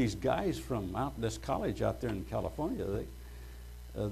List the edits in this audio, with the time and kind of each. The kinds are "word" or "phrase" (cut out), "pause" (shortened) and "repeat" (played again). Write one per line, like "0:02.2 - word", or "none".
none

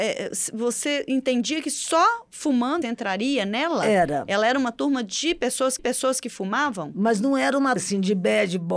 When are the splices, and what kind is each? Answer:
0:02.8 - phrase
0:05.8 - repeat
0:07.8 - phrase

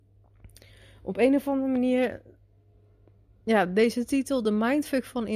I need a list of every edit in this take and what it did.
none

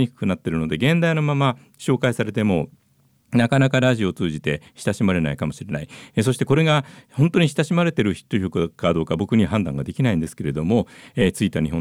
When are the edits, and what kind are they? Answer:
none

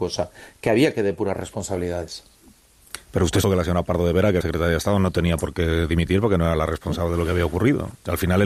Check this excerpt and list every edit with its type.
0:03.4 - word
0:04.4 - word

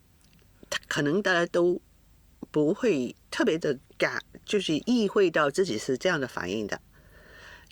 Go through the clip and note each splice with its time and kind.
0:03.2 - pause
0:03.8 - pause

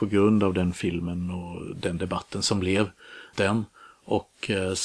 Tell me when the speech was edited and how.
0:03.3 - word

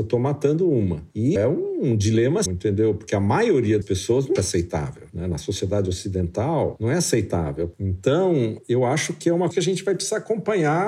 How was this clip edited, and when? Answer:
0:01.4 - word
0:02.5 - word
0:03.8 - word
0:04.4 - word
0:09.5 - word

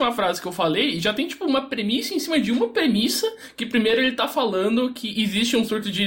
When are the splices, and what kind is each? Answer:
none

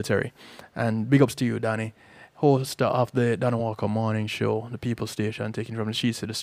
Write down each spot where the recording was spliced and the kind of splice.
none

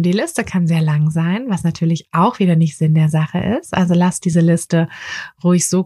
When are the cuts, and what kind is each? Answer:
none

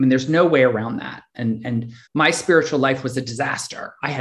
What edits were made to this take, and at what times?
0:02.1 - pause

